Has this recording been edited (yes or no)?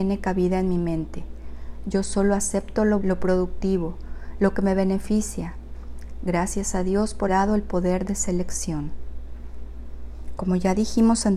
yes